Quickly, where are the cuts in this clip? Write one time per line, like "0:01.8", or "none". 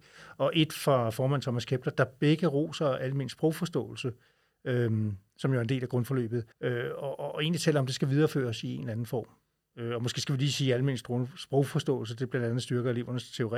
0:06.5

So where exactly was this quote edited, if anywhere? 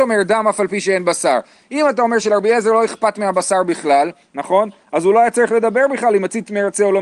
none

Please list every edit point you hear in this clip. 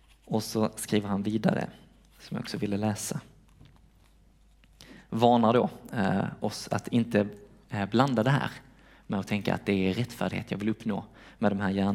none

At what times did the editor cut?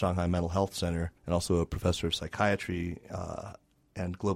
0:01.2

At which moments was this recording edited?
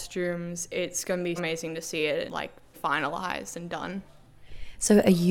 0:01.4
0:02.3
0:02.7

